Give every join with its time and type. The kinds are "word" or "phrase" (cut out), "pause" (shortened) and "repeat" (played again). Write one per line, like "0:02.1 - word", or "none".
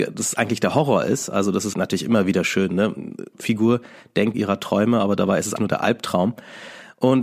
0:01.7 - word
0:04.3 - phrase
0:05.6 - word